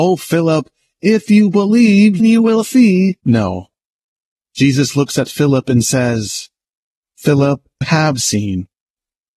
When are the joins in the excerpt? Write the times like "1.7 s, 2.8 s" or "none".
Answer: 2.2 s, 3.2 s, 7.8 s